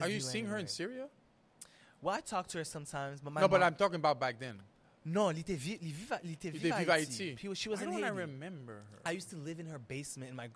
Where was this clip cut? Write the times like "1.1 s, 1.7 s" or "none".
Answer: 4.8 s